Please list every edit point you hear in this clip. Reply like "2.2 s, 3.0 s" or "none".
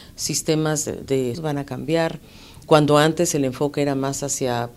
1.3 s, 2.6 s